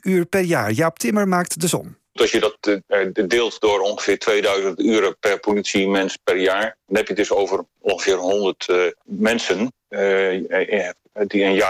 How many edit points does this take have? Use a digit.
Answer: 1